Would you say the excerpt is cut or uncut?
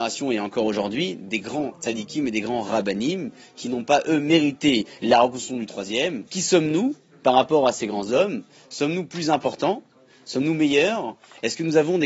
cut